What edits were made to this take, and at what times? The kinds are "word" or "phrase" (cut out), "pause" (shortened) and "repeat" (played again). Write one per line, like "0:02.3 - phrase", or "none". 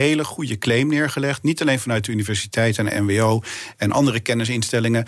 none